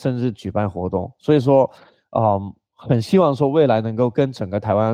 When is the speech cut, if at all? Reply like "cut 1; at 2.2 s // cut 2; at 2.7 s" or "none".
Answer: none